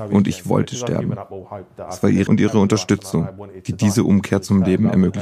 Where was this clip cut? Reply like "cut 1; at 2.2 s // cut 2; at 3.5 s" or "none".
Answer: cut 1; at 2.3 s